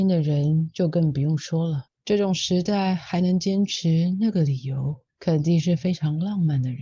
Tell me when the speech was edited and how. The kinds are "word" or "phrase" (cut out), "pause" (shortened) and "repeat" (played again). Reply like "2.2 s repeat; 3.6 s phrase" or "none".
1.9 s pause; 5.1 s pause